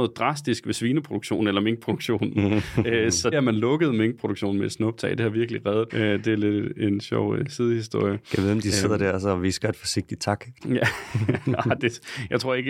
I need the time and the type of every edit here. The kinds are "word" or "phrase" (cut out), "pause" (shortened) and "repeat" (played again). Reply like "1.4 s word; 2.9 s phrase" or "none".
3.3 s word; 5.9 s phrase